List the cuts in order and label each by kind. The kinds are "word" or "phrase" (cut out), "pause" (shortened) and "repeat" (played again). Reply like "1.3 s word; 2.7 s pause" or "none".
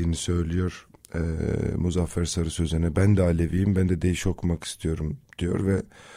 none